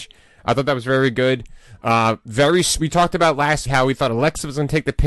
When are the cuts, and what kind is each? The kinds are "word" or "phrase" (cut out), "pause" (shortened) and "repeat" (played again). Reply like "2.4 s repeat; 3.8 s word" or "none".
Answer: 3.7 s word